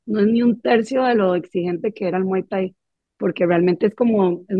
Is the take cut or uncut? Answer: uncut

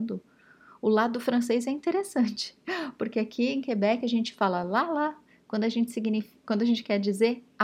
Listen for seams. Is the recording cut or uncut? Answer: uncut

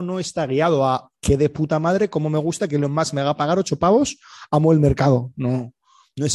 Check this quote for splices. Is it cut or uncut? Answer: cut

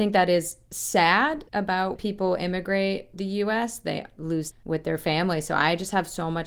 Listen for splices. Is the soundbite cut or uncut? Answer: cut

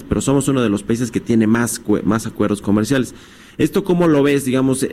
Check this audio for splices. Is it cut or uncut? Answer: uncut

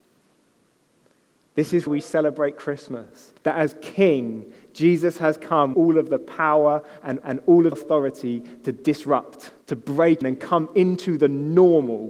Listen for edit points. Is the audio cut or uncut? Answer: cut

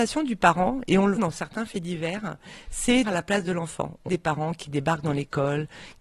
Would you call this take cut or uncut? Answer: cut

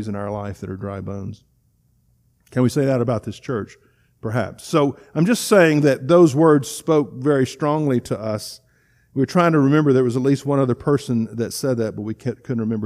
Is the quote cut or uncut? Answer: uncut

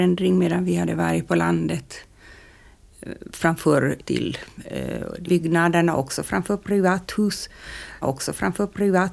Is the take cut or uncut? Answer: cut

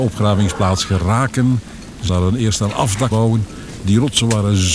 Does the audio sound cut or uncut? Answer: cut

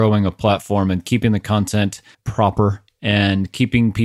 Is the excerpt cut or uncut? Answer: cut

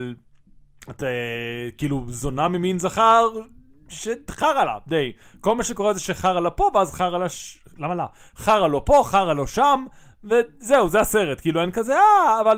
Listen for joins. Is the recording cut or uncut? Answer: uncut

